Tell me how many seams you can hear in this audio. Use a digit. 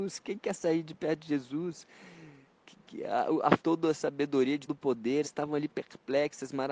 3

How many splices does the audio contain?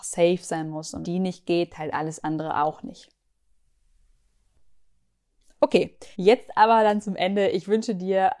3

